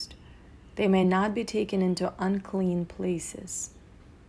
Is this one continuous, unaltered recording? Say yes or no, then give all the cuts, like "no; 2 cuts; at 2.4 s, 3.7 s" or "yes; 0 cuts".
yes; 0 cuts